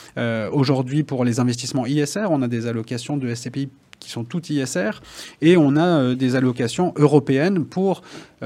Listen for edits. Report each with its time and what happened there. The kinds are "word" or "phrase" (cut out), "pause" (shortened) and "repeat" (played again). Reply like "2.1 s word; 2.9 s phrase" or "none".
none